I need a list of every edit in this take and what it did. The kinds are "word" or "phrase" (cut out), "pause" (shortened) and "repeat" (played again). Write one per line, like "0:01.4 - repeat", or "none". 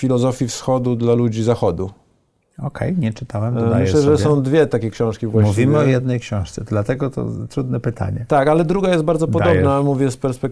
none